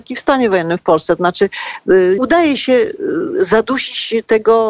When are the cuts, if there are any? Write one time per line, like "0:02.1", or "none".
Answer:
0:02.2
0:02.6

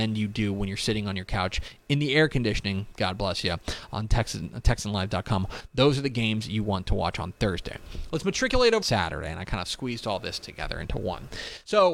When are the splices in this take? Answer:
0:08.8

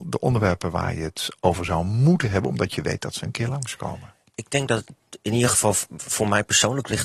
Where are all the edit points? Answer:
none

